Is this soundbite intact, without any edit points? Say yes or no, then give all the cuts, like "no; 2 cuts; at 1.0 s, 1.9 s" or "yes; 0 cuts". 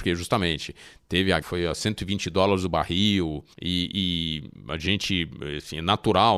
no; 2 cuts; at 1.4 s, 3.5 s